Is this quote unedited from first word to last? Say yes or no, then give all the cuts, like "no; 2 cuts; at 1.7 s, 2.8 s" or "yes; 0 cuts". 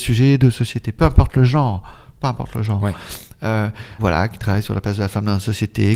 no; 1 cut; at 4.0 s